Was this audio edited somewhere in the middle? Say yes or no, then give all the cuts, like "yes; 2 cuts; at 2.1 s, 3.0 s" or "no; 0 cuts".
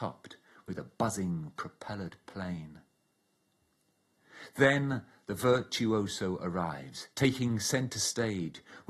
yes; 1 cut; at 7.1 s